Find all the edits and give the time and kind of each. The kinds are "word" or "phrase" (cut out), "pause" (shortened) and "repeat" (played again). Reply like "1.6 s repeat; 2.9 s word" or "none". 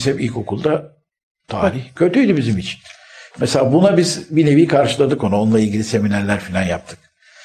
none